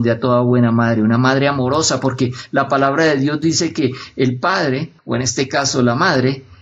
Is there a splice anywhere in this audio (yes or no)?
yes